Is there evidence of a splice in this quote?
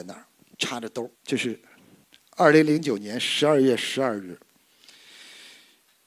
yes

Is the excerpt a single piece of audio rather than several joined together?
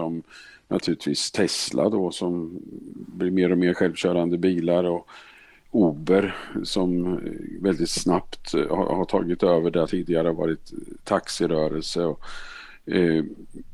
no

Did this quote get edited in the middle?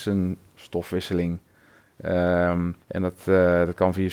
yes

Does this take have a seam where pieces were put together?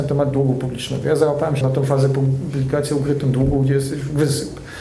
yes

